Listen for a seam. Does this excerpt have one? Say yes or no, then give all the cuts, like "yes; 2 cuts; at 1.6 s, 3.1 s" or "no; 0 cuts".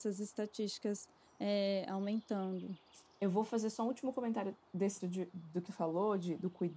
yes; 2 cuts; at 5.0 s, 5.7 s